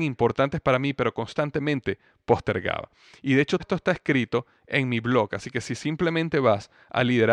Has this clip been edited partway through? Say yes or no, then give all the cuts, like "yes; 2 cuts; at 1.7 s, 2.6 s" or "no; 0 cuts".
yes; 1 cut; at 3.6 s